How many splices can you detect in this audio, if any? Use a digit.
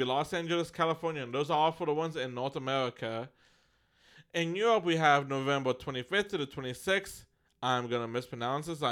0